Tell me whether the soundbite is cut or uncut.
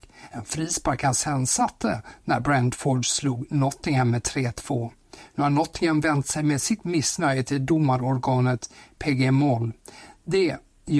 uncut